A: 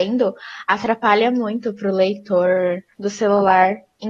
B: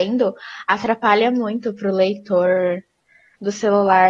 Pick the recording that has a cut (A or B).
A